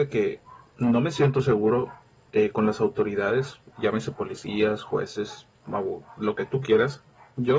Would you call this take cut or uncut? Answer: uncut